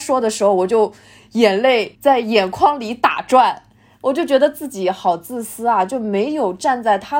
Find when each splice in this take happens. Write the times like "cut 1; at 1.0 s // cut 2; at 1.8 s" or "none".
none